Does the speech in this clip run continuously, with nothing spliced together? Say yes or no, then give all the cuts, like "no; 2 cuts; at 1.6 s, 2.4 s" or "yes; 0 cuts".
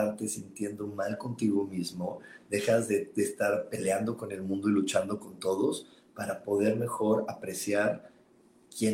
yes; 0 cuts